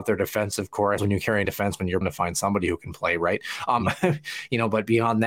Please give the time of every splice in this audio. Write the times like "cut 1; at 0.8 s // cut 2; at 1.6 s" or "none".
cut 1; at 1.0 s // cut 2; at 1.4 s // cut 3; at 2.0 s